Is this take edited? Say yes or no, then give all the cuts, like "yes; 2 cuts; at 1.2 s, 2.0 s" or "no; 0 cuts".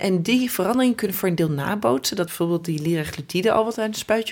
yes; 1 cut; at 2.3 s